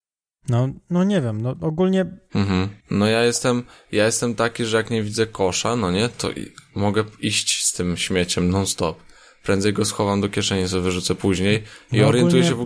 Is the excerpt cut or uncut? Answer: cut